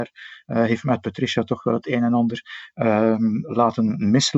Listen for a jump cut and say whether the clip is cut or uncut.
uncut